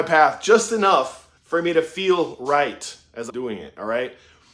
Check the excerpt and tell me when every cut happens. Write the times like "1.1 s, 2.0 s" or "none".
1.4 s, 3.3 s